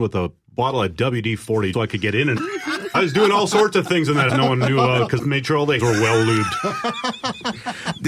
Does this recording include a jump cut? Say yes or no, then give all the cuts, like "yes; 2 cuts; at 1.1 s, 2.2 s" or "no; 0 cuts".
yes; 6 cuts; at 1.7 s, 2.4 s, 2.9 s, 4.3 s, 5.2 s, 5.8 s